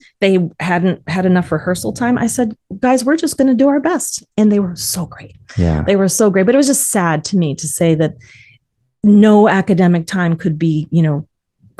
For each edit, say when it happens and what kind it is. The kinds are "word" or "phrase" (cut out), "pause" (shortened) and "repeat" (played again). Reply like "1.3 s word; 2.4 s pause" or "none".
none